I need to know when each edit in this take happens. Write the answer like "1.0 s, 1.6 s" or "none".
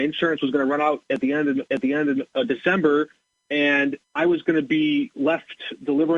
1.7 s, 4.0 s